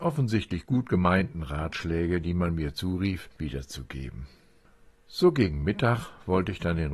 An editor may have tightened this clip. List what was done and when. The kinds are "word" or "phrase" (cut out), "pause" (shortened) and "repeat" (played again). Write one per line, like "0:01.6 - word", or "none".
0:04.6 - pause

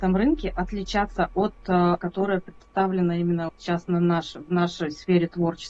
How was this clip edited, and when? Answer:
0:02.0 - phrase
0:03.5 - word

